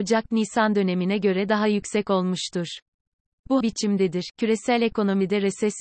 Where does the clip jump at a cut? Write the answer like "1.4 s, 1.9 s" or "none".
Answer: 3.6 s